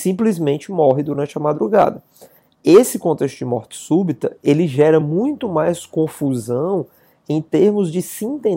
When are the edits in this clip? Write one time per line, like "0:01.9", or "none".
none